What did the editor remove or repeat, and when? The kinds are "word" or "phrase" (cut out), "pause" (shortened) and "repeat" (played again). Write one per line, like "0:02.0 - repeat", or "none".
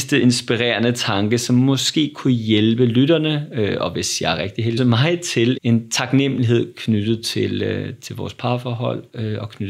0:04.8 - word
0:05.6 - word